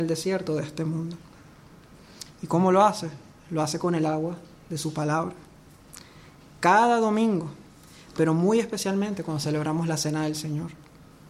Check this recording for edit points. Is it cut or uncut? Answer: uncut